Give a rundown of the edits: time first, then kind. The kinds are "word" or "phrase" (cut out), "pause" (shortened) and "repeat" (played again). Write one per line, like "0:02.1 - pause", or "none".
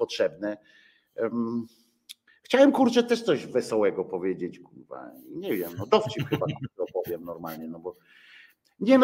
none